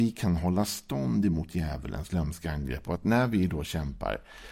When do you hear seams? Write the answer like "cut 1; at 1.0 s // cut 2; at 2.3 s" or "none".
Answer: none